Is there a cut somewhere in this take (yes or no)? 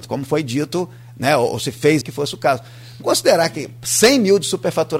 yes